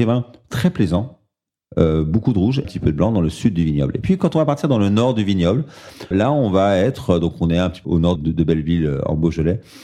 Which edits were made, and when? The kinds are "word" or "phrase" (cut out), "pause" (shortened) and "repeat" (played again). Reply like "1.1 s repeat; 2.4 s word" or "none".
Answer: 2.6 s phrase; 6.1 s word; 7.8 s word; 8.2 s word

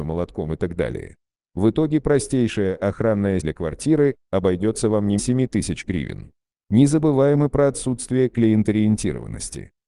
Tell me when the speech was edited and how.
3.4 s word; 5.2 s word

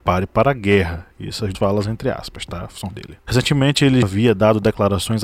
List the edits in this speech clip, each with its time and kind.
1.5 s word; 2.9 s word; 4.0 s word

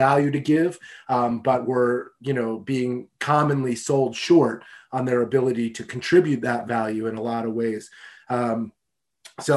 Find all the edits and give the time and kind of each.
none

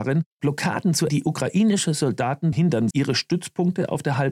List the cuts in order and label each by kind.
1.1 s word; 2.5 s word; 2.9 s word

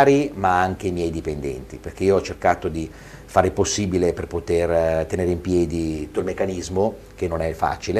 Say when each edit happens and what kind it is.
6.1 s word

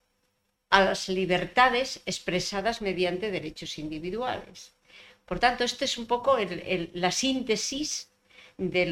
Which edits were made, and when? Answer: none

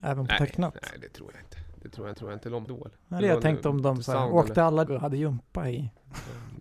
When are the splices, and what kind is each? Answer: 2.1 s repeat; 2.7 s phrase; 3.2 s word; 4.9 s phrase

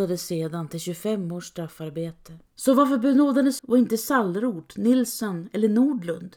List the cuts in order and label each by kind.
2.5 s pause; 3.6 s word

